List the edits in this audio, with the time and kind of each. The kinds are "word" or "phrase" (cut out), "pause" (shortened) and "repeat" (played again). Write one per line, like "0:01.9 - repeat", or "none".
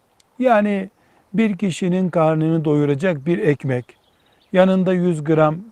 none